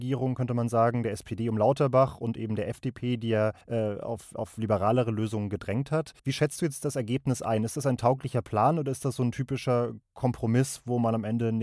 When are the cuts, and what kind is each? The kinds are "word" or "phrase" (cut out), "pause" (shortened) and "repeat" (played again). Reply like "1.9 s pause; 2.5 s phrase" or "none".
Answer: 3.6 s pause; 6.2 s pause